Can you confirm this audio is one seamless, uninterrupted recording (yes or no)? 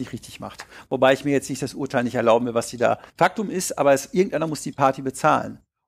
no